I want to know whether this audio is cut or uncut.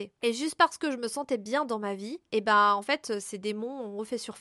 uncut